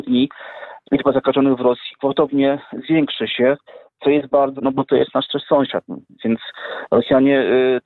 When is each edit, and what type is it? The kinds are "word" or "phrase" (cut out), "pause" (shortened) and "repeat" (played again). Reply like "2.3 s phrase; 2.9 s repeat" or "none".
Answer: 4.6 s word

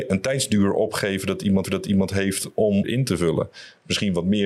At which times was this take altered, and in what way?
1.6 s repeat; 2.8 s phrase

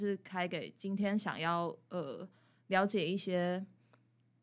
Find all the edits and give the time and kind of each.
none

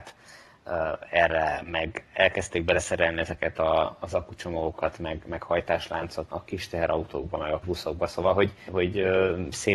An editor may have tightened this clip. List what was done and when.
6.3 s word; 7.6 s word; 8.7 s word

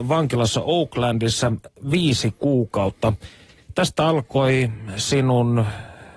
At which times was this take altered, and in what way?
none

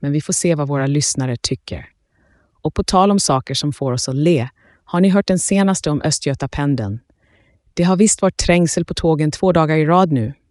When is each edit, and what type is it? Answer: none

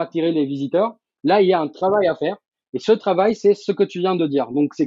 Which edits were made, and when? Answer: none

